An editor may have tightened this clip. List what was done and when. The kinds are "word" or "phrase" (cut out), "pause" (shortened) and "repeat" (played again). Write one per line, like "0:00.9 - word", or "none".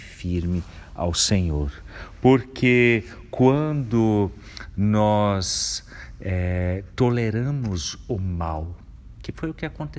none